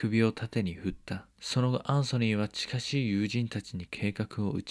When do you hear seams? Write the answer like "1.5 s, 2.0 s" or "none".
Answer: 1.3 s